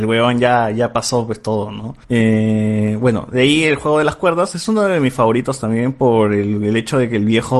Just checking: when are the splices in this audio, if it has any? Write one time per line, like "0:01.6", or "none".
0:02.0

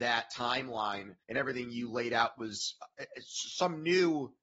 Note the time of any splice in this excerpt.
0:01.2

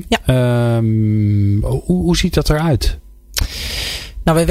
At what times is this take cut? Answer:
none

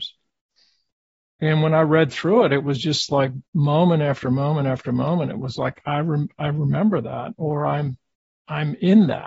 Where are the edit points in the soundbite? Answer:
0:03.5

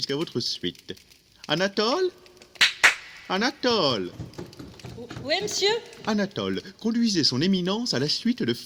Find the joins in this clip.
none

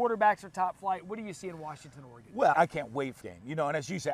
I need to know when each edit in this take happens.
0:02.5
0:03.2

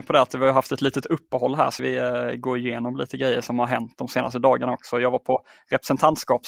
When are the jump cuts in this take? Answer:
0:01.8

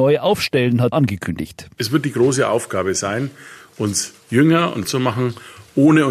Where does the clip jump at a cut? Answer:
0:00.9
0:04.8

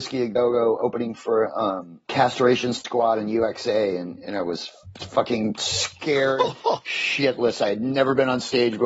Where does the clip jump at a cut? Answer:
0:02.1

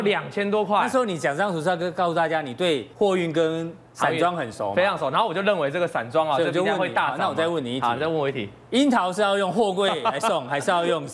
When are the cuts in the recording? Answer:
0:02.9

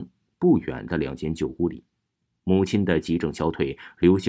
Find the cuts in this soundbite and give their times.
none

